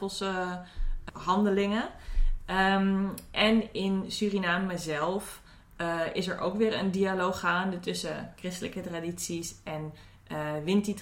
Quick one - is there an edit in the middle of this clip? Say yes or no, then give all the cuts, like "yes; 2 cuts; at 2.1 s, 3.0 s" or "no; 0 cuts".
no; 0 cuts